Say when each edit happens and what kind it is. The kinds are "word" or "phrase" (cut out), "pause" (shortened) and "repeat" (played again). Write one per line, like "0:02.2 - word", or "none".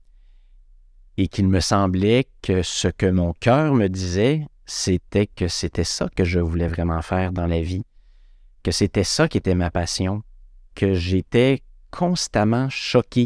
none